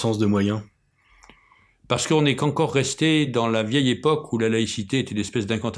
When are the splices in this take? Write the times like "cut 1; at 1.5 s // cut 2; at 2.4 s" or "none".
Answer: none

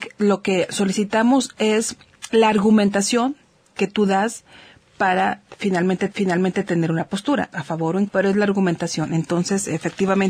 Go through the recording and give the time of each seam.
cut 1; at 6.1 s // cut 2; at 7.5 s // cut 3; at 8.1 s

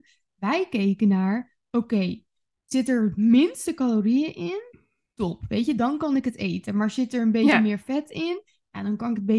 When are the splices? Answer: none

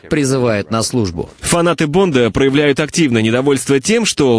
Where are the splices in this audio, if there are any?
none

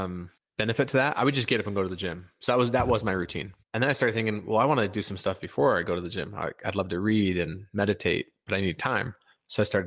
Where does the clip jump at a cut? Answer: cut 1; at 3.6 s

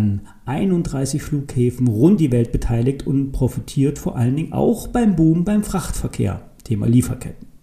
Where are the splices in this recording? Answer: cut 1; at 2.2 s

